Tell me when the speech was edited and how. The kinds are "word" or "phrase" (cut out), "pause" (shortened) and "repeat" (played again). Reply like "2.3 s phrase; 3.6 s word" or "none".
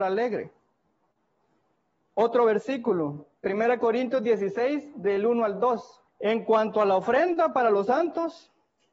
6.1 s pause